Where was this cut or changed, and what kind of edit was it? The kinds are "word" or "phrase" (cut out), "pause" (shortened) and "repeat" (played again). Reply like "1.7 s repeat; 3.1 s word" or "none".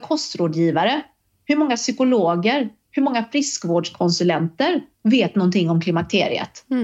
none